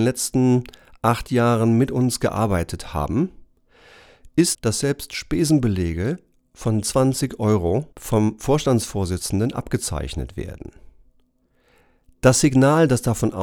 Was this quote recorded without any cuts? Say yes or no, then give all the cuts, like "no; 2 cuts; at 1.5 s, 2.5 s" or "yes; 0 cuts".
no; 2 cuts; at 4.5 s, 7.9 s